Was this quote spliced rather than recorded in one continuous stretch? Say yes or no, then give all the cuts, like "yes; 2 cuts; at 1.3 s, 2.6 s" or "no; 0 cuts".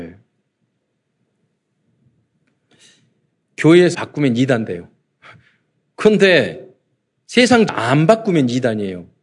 yes; 2 cuts; at 3.9 s, 7.7 s